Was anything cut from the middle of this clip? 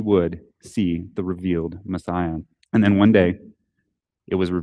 yes; 1 cut; at 2.6 s

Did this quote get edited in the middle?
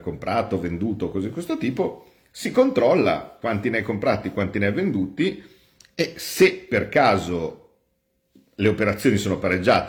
no; 0 cuts

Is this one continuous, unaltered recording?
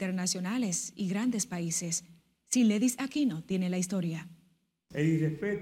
yes; 0 cuts

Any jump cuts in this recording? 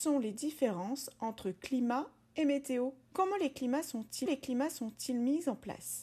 yes; 2 cuts; at 3.0 s, 4.3 s

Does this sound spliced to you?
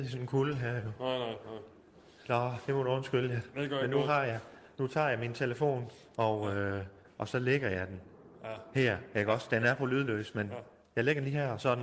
no; 0 cuts

